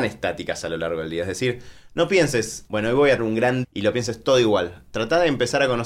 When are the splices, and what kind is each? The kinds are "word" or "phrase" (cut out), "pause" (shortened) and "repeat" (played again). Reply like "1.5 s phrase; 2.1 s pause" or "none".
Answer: 2.7 s word; 3.2 s word; 3.6 s word